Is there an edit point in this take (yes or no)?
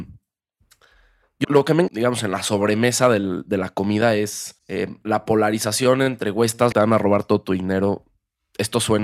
yes